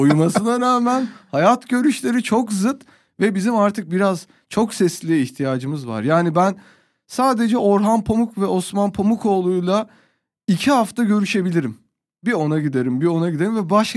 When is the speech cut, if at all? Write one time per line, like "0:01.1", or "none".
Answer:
none